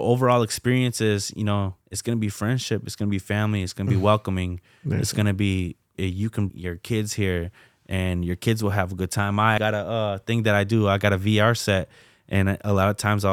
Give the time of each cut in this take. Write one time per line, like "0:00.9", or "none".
0:01.8
0:05.9
0:06.5
0:09.6

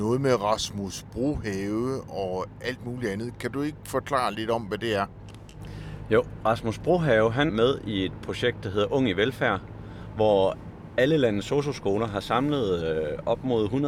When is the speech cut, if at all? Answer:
0:07.5

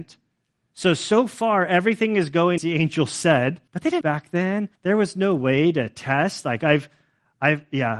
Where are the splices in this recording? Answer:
0:02.6
0:03.7
0:04.0
0:04.8

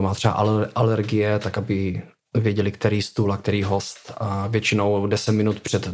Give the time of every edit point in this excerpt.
none

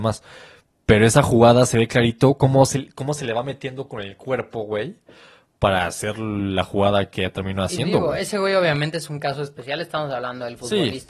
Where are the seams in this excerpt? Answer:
none

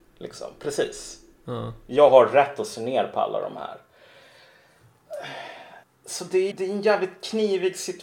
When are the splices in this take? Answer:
0:05.8
0:06.5

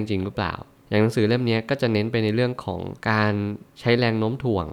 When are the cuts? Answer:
0:03.0

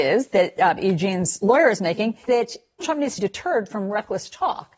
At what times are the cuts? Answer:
0:02.3
0:02.8
0:03.2

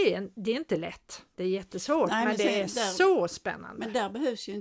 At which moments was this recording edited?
none

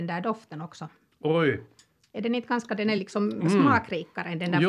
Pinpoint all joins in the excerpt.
none

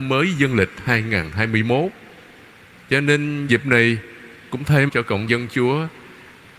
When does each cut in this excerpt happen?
0:03.5
0:04.5
0:04.9
0:05.3

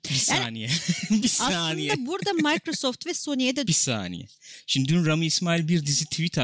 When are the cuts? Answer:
0:03.7

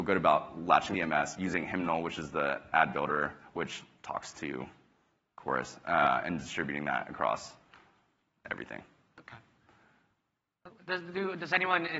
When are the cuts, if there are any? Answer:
none

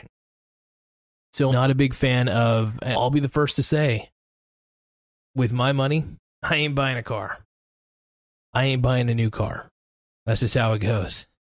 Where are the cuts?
0:01.5
0:02.9

